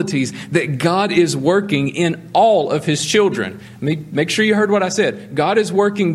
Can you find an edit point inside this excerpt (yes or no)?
no